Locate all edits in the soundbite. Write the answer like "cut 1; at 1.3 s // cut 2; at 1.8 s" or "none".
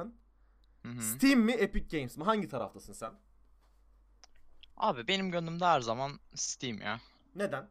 cut 1; at 4.7 s